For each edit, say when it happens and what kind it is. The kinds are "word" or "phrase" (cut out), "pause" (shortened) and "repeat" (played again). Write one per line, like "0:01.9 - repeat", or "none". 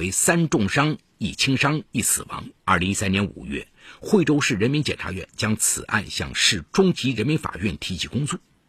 0:02.6 - pause